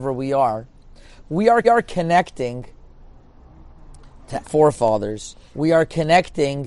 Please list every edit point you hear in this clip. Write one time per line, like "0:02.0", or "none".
0:01.6
0:04.4
0:05.4